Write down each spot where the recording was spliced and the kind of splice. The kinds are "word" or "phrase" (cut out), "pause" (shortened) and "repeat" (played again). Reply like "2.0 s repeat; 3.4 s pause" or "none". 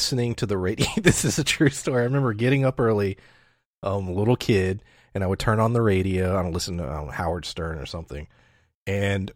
none

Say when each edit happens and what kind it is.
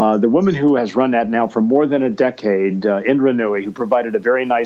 none

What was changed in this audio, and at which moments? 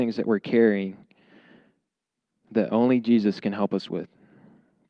2.7 s word

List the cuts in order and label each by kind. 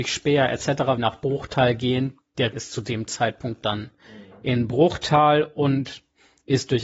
1.0 s phrase; 2.5 s word

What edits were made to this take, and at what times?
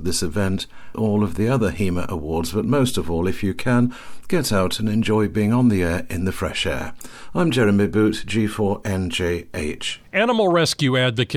0.9 s word

